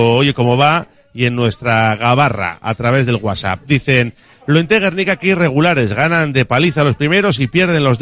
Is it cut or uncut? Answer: uncut